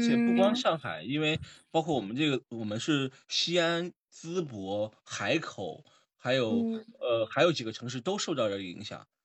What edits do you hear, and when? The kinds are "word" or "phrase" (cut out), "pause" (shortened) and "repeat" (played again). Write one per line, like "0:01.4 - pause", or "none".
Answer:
none